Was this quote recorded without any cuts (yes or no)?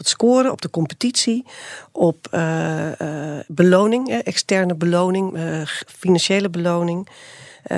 yes